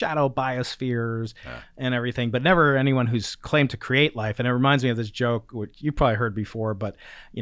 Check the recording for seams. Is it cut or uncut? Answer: uncut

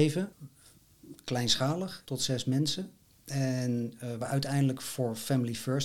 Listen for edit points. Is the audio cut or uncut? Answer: cut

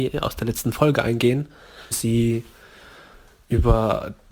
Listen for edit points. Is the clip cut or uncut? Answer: cut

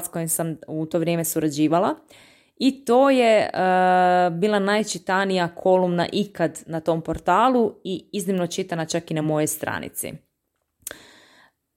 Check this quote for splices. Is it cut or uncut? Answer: uncut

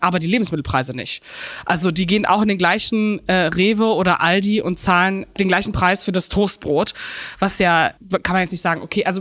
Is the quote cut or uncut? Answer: uncut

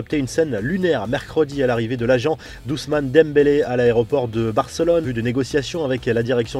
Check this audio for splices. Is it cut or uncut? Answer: cut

